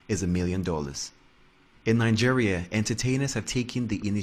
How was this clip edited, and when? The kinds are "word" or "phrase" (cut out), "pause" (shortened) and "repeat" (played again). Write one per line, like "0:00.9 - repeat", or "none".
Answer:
none